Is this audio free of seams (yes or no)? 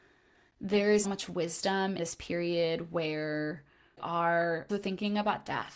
no